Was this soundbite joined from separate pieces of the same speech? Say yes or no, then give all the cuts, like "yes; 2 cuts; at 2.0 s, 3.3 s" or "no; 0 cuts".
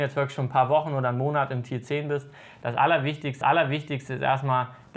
yes; 1 cut; at 3.4 s